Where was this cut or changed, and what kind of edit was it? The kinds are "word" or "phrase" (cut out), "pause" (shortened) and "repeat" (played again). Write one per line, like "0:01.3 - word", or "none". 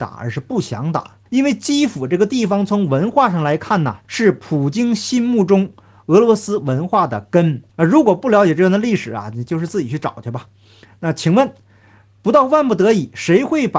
0:01.3 - pause
0:04.0 - pause
0:07.7 - pause